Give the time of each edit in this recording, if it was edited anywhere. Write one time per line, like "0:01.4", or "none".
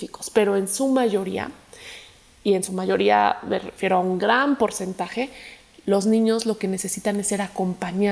none